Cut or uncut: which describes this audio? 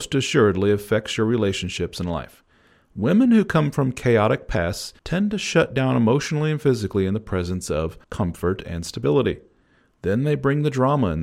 cut